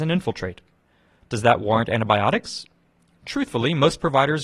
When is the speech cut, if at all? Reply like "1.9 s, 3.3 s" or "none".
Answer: none